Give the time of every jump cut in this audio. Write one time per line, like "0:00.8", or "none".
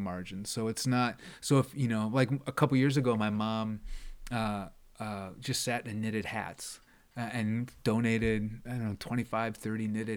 0:06.9